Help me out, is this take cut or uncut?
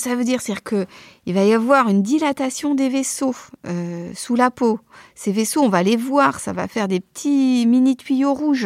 uncut